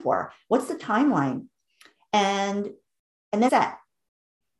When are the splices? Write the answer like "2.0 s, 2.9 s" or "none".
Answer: 3.5 s